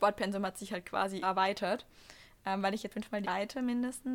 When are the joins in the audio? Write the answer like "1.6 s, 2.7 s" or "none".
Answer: 1.2 s, 2.9 s, 3.2 s

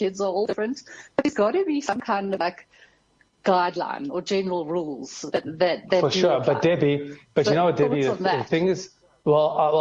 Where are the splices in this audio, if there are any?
none

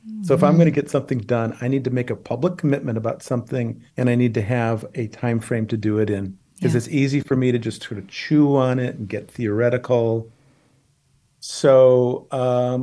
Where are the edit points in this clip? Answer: 3.9 s, 6.4 s

